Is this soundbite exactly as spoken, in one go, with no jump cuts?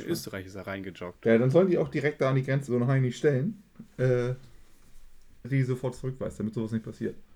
no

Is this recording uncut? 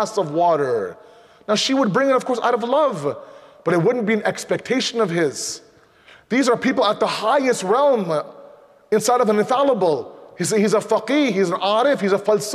yes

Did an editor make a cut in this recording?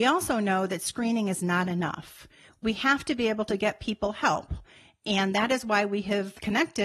no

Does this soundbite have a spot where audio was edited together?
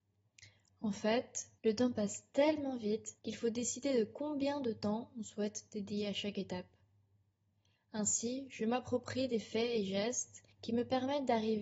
yes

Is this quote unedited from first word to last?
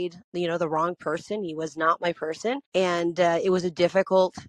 no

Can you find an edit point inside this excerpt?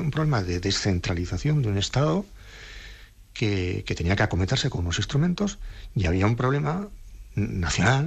no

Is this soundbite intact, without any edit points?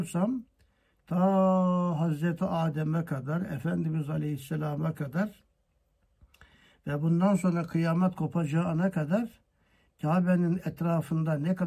yes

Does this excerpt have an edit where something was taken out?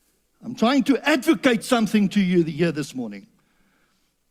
no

